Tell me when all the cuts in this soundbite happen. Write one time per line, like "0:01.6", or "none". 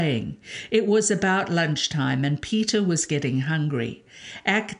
none